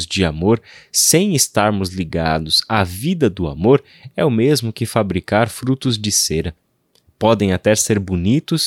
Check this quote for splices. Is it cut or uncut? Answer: uncut